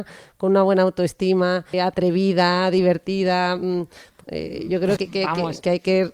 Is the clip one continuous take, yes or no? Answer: no